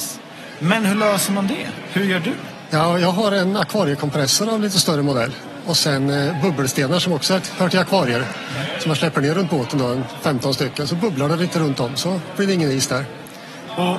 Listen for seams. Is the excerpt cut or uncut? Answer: uncut